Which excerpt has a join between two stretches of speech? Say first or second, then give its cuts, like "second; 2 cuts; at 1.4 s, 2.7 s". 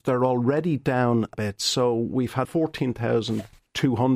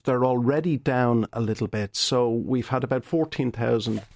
first; 2 cuts; at 1.3 s, 2.4 s